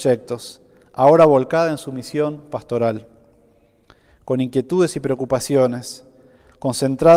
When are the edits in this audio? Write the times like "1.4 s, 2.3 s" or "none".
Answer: none